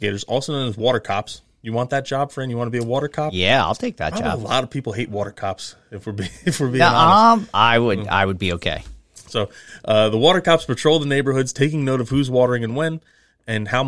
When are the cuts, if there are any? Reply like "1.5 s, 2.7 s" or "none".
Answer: none